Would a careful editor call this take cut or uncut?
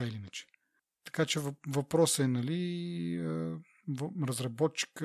uncut